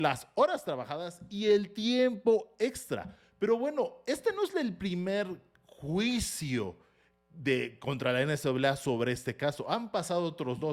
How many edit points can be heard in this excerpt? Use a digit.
0